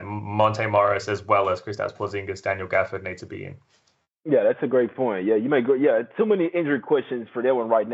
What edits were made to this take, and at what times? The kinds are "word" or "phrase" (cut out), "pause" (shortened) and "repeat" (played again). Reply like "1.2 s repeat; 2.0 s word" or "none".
none